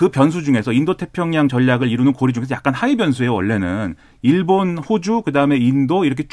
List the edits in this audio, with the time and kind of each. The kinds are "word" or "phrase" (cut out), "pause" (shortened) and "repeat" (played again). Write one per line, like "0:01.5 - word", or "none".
none